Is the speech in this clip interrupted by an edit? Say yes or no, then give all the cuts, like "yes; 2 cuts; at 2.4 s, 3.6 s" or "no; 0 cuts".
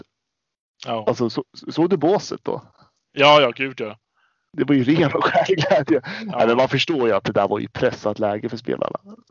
no; 0 cuts